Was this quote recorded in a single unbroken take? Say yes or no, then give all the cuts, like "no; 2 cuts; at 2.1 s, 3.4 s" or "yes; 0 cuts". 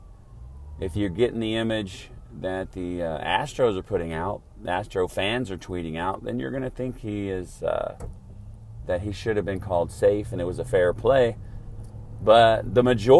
yes; 0 cuts